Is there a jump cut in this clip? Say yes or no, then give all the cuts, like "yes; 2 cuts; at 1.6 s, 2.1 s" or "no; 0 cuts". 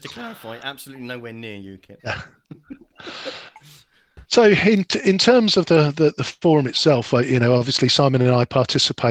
yes; 2 cuts; at 2.0 s, 4.2 s